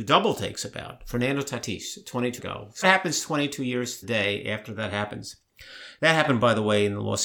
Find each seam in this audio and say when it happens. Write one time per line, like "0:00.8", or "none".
0:02.4
0:02.8
0:04.0